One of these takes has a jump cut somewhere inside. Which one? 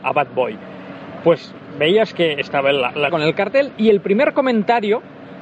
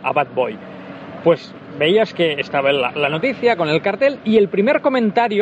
first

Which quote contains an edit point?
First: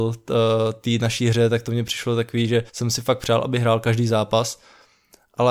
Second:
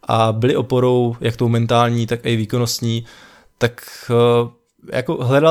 first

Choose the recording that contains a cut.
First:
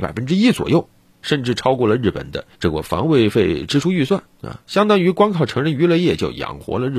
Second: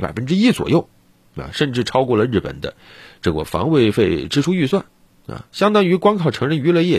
first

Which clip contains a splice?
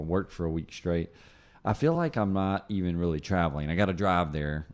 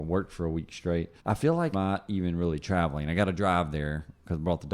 second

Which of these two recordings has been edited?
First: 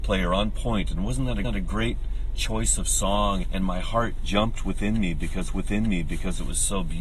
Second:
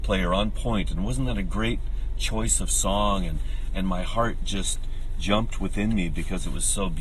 first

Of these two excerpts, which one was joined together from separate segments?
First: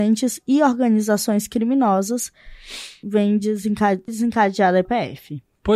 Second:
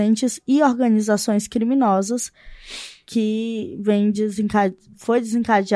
first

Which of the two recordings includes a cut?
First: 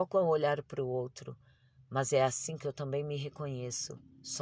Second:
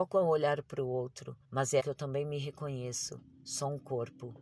second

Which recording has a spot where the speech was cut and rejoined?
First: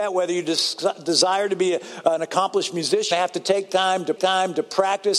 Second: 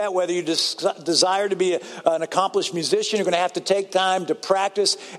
first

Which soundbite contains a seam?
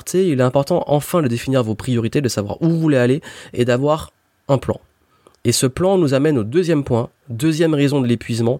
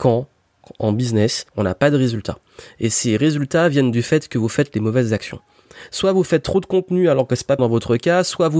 second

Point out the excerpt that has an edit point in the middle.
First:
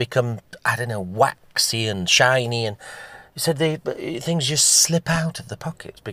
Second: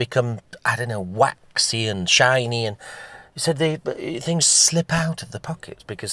second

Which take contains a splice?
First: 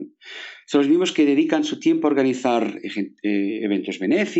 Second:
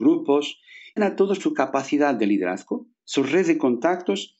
second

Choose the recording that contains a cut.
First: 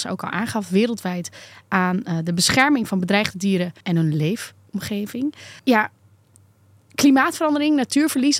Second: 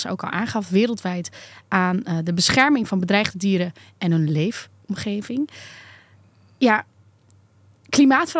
first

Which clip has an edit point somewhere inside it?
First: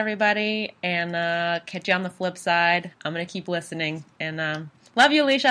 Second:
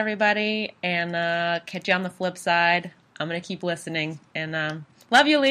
first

